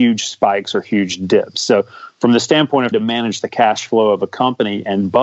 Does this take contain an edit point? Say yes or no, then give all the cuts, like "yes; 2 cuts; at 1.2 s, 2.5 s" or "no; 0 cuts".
yes; 1 cut; at 2.9 s